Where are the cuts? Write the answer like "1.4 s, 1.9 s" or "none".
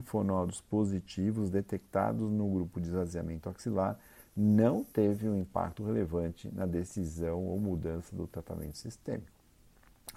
none